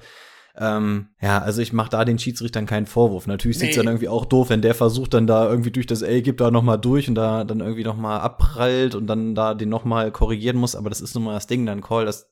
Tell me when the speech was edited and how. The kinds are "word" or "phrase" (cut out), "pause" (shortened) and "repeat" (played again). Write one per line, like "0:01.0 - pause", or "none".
0:01.1 - pause
0:04.5 - word